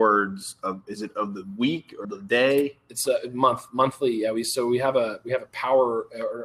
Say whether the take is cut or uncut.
cut